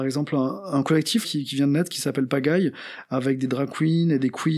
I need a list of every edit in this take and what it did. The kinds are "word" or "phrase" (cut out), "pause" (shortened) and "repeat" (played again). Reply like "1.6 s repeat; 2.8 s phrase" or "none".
1.2 s word